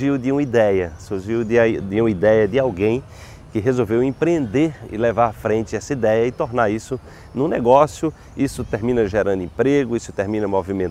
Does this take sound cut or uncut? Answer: uncut